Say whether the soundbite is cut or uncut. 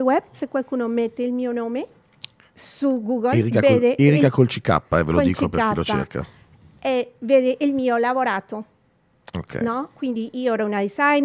uncut